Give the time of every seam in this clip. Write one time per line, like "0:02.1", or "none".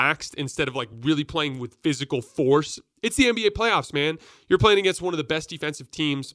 none

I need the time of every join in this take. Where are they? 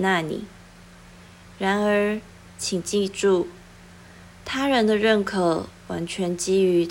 none

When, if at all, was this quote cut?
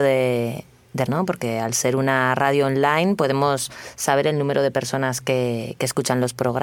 0:01.1

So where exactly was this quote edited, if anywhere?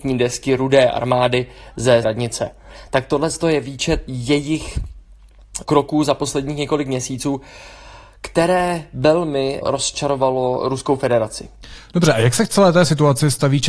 0:02.0
0:04.1
0:05.6
0:09.6

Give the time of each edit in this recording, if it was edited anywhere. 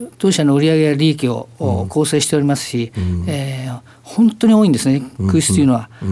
none

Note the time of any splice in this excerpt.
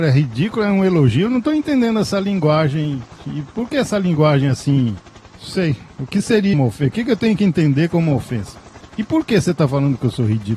0:06.5

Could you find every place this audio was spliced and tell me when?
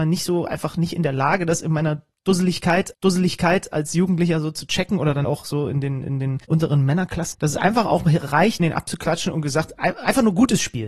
0:02.9
0:05.2
0:06.4
0:07.3
0:08.6

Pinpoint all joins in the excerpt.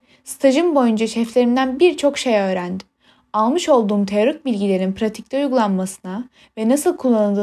0:03.0

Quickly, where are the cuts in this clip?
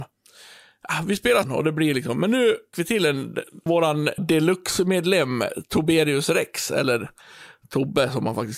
0:01.4
0:02.7
0:03.7
0:04.2

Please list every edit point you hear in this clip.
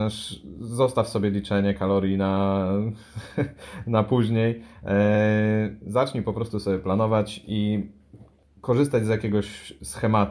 0:08.4

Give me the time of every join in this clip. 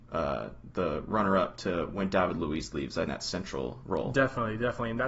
0:03.1

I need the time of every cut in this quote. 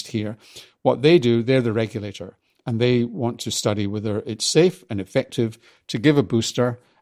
none

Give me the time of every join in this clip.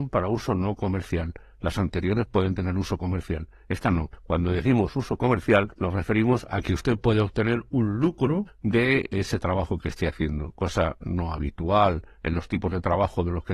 none

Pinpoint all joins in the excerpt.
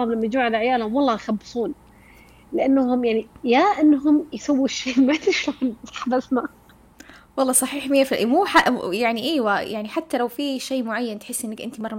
none

